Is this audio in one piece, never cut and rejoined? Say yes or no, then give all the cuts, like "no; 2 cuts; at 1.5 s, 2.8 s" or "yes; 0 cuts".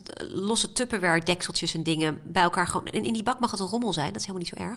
yes; 0 cuts